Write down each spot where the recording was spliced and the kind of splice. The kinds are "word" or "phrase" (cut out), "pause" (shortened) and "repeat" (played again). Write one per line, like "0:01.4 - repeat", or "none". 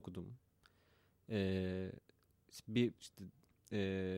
0:03.0 - word